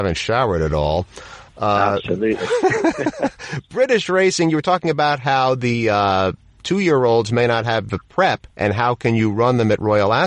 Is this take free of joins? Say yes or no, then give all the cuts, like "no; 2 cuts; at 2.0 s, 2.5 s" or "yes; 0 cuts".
no; 1 cut; at 8.5 s